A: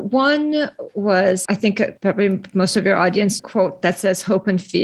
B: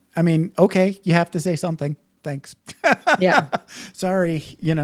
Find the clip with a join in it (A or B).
A